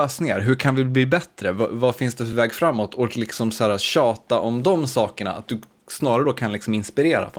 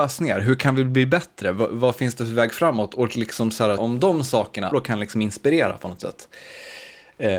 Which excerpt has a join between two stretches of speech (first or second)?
second